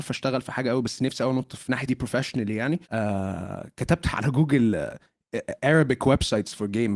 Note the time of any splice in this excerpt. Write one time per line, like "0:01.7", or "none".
0:01.9
0:02.8